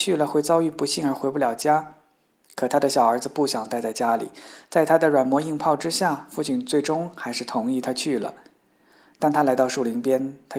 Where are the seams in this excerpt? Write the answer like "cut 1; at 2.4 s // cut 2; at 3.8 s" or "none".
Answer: none